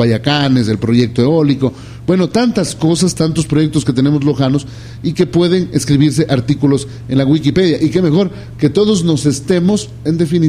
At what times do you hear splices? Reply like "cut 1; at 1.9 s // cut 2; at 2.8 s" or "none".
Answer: none